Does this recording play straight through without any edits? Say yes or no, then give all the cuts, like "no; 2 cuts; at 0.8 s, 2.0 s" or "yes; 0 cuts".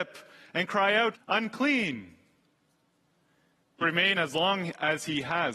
no; 3 cuts; at 1.1 s, 3.8 s, 4.1 s